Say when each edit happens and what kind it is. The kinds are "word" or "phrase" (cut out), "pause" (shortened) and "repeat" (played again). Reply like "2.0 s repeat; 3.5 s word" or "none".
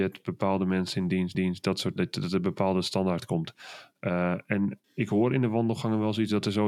1.3 s repeat; 2.0 s word; 4.8 s pause